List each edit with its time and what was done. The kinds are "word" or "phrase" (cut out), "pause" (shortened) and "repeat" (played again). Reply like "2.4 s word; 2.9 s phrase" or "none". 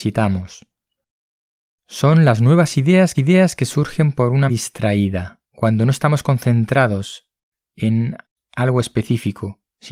3.1 s repeat; 4.5 s word